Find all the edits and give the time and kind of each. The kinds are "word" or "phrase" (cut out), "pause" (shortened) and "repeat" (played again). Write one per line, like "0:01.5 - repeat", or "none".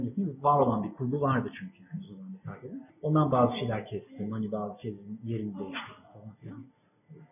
none